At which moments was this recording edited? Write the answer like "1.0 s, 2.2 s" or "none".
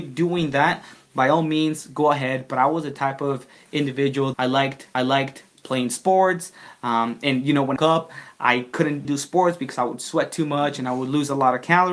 4.3 s, 4.9 s, 7.8 s, 9.0 s